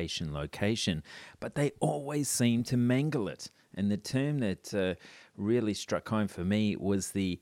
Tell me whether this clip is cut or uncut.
uncut